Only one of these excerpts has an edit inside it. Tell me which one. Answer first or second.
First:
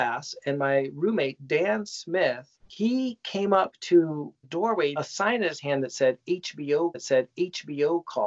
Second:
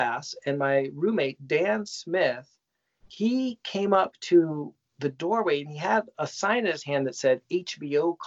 first